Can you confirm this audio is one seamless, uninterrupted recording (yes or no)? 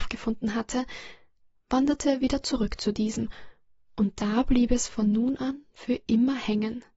yes